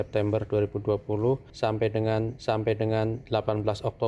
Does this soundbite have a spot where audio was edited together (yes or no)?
yes